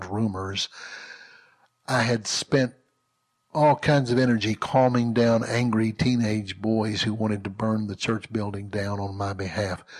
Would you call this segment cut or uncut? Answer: uncut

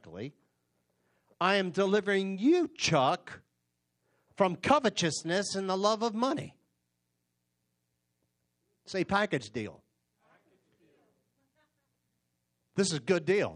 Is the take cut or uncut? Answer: uncut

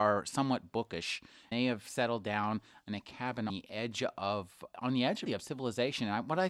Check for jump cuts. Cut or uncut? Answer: cut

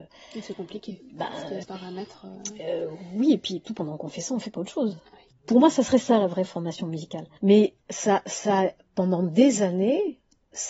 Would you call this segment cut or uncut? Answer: cut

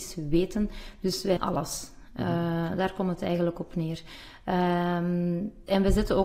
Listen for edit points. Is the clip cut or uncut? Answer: cut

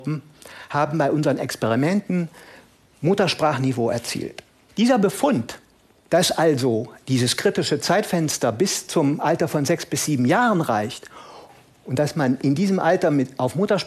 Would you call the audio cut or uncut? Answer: uncut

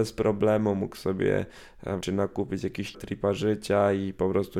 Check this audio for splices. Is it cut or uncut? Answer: cut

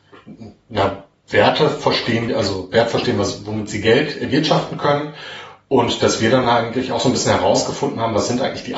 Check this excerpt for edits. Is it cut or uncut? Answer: uncut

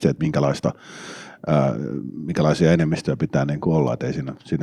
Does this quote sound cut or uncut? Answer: uncut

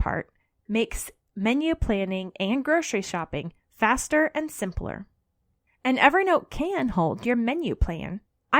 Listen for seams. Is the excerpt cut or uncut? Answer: uncut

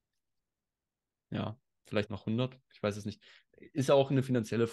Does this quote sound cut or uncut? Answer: cut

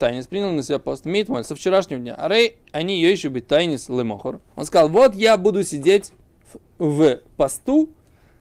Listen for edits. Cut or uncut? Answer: cut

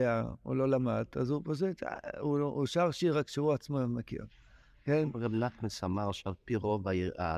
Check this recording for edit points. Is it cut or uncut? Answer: uncut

